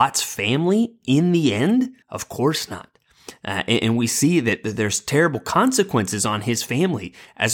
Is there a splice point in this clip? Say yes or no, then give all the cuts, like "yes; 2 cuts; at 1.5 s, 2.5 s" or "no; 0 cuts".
yes; 1 cut; at 2.0 s